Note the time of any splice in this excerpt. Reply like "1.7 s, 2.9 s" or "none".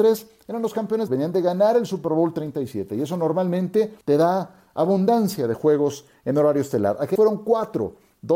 1.1 s, 4.0 s, 7.2 s